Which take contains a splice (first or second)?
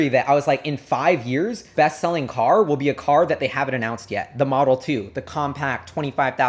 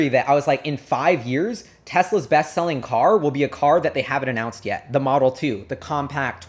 first